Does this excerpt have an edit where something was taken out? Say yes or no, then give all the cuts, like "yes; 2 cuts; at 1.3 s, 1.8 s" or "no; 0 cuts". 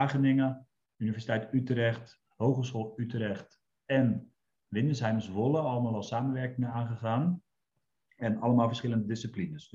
no; 0 cuts